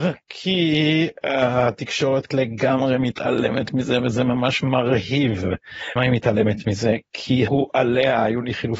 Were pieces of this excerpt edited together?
yes; 3 cuts; at 2.3 s, 6.0 s, 7.5 s

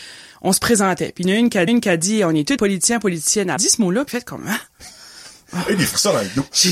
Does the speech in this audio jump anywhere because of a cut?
yes; 4 cuts; at 1.7 s, 2.6 s, 3.6 s, 4.1 s

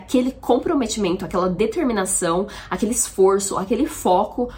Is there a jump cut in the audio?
no; 0 cuts

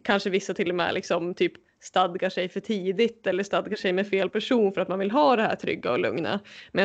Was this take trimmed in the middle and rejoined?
no; 0 cuts

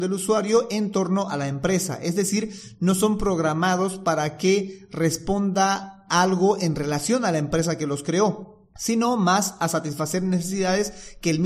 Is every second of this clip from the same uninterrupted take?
yes; 0 cuts

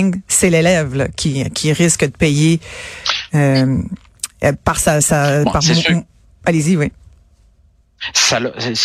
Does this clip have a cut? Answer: no; 0 cuts

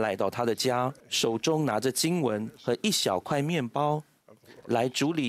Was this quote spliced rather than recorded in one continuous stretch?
yes; 1 cut; at 1.0 s

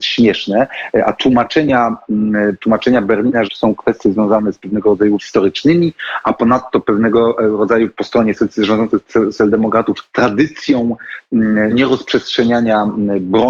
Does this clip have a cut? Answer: yes; 3 cuts; at 3.4 s, 5.2 s, 11.7 s

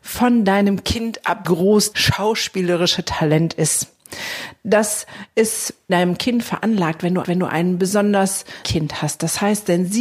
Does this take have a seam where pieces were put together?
yes; 5 cuts; at 1.4 s, 1.9 s, 5.9 s, 7.2 s, 8.6 s

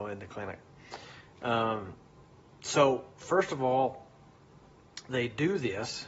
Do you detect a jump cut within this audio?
no; 0 cuts

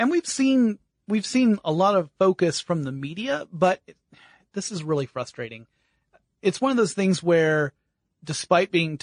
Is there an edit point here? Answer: no; 0 cuts

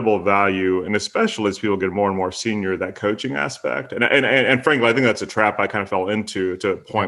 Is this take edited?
no; 0 cuts

